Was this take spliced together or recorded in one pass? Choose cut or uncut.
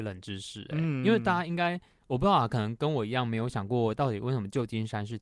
uncut